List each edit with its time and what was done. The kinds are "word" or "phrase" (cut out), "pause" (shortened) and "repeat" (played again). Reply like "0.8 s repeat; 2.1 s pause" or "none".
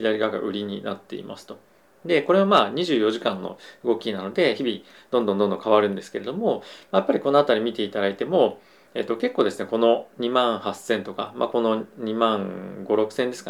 none